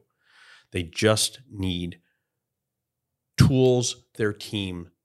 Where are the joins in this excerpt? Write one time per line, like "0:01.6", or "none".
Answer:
0:04.1